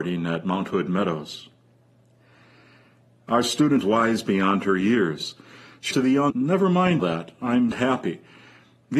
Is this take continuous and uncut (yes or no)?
no